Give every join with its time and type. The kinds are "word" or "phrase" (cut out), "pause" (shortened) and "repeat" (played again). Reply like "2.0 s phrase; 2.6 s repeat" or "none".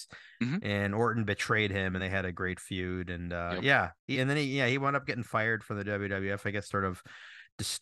2.0 s word; 4.1 s word; 6.6 s phrase